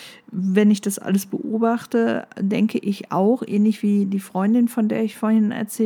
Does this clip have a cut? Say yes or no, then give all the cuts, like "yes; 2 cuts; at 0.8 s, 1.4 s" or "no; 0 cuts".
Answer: no; 0 cuts